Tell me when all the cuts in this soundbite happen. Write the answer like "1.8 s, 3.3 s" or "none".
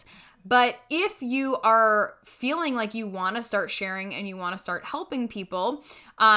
none